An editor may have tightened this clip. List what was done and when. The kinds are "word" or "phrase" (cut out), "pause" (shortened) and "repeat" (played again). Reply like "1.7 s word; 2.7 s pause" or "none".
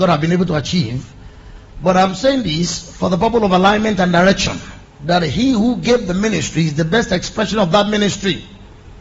4.9 s pause